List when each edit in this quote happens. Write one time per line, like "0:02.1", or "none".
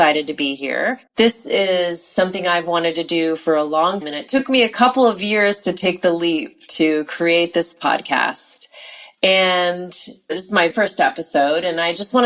0:01.1
0:04.0
0:10.7